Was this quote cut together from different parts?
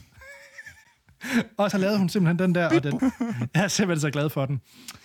yes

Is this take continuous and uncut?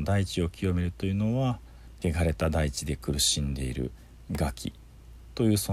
no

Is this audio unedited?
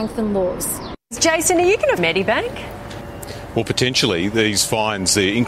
no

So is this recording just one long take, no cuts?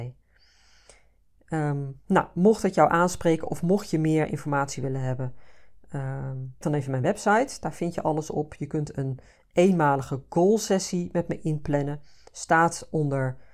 no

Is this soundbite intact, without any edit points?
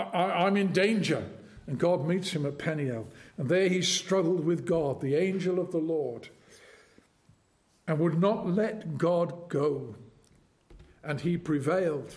yes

